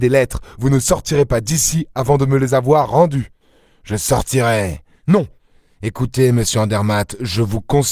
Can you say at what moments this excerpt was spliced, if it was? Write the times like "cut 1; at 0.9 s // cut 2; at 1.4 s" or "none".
none